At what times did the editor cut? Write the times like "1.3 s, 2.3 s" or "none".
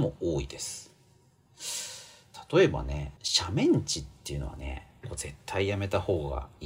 3.2 s

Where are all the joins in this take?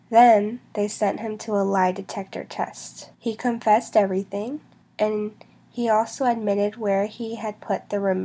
3.1 s, 4.8 s

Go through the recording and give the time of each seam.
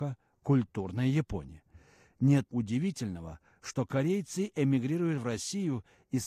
2.5 s

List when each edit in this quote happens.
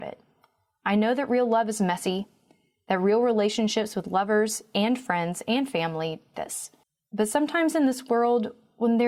6.3 s, 6.8 s

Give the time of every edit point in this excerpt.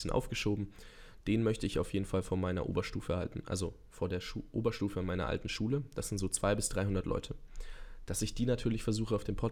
none

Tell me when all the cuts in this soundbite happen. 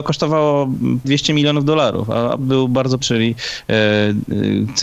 1.0 s, 2.4 s, 3.0 s

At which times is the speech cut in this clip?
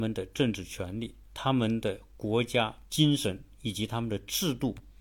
2.9 s

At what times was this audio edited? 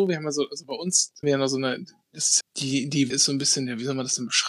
1.2 s, 2.4 s, 3.1 s

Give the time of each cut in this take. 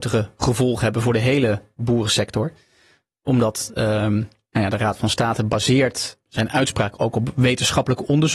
6.3 s

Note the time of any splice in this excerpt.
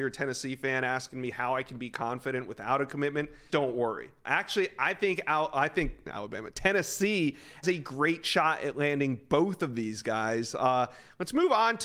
3.5 s, 7.6 s

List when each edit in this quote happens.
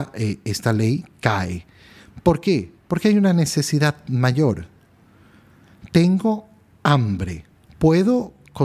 2.8 s, 7.7 s

